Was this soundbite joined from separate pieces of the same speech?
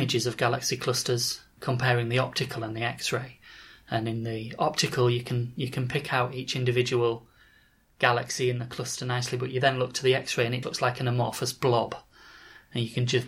yes; 2 cuts; at 1.6 s, 10.6 s

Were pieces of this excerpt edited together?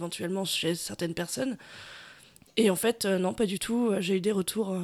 no; 0 cuts

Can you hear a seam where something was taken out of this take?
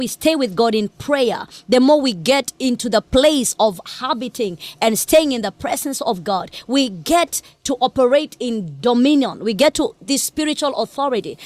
no; 0 cuts

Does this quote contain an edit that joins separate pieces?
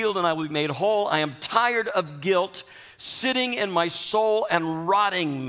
no; 0 cuts

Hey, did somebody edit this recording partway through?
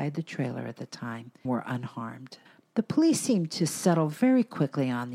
yes; 2 cuts; at 1.4 s, 2.5 s

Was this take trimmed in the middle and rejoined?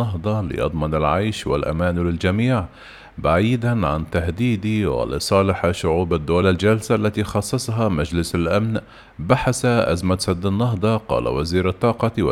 yes; 1 cut; at 6.4 s

